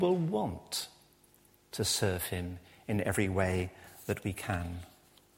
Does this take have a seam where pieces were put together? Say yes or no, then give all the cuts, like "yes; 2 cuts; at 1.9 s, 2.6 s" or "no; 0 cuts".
no; 0 cuts